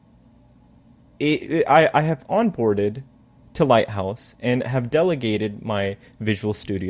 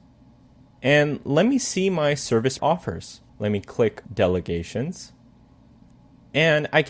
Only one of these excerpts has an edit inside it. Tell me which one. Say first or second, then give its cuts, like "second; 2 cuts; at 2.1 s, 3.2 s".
second; 3 cuts; at 2.6 s, 3.3 s, 4.0 s